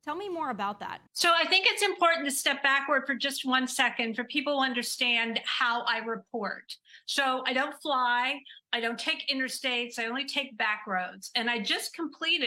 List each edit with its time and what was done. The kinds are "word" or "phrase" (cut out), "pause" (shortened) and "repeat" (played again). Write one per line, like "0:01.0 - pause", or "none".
0:01.1 - pause